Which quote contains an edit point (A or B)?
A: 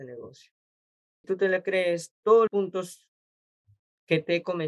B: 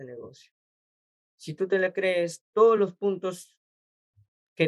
A